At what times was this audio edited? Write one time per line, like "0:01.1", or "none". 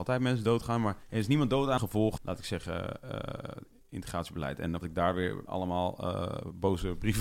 0:01.0
0:01.8
0:02.2
0:04.8
0:05.5